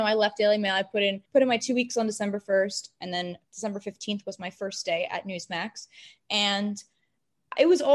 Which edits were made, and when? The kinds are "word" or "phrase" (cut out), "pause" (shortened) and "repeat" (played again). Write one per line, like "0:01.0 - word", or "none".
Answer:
0:01.3 - pause
0:03.4 - pause